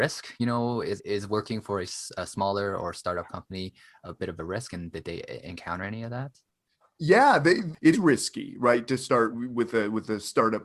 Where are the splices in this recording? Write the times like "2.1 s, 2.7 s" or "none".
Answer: 1.0 s, 7.9 s, 9.3 s